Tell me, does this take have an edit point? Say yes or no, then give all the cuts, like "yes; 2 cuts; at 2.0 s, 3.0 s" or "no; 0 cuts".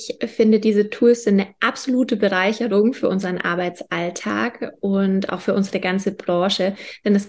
no; 0 cuts